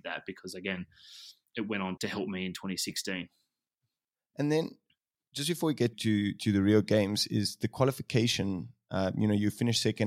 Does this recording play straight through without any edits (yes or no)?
no